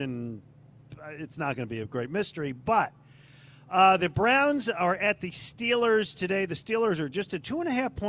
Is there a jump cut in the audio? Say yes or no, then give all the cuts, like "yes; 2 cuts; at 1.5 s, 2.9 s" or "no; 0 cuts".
no; 0 cuts